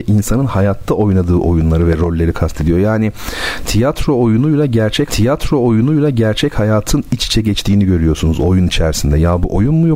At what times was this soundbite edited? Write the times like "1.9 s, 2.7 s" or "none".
5.1 s